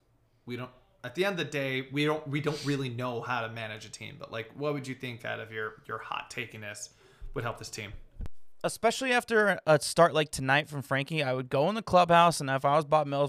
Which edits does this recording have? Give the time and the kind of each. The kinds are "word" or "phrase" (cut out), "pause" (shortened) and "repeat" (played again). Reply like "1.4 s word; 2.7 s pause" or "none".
none